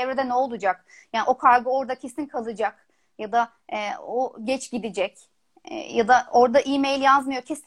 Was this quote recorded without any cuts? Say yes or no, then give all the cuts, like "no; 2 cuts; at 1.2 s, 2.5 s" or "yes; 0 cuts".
yes; 0 cuts